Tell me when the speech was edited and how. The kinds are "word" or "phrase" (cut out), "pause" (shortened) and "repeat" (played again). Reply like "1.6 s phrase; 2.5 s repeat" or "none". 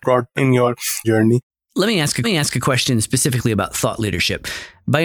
1.0 s word; 1.5 s pause; 2.2 s repeat